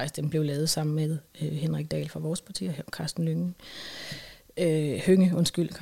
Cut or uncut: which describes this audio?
uncut